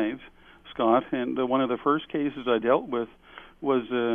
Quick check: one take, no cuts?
yes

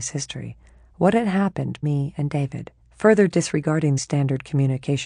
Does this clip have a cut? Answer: yes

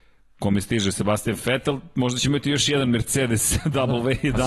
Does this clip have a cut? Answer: no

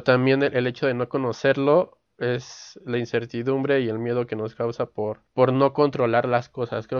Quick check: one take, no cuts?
yes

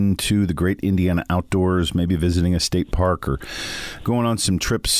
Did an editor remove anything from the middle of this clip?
no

